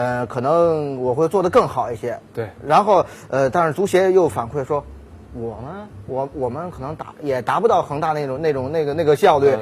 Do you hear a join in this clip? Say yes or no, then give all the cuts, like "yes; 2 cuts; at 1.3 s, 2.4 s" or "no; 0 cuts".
no; 0 cuts